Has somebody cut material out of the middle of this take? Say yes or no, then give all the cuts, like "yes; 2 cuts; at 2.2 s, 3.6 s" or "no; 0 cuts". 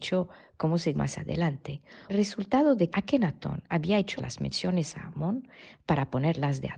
yes; 4 cuts; at 0.9 s, 2.1 s, 2.9 s, 4.2 s